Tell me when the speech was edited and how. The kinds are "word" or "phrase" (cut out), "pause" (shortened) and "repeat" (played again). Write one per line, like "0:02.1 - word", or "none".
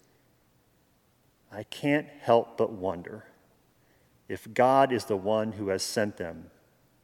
none